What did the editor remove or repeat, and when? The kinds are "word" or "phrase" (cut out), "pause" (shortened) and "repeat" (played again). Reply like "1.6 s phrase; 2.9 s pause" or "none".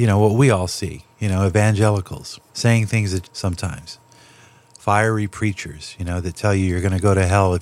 1.1 s pause; 2.5 s pause; 3.2 s phrase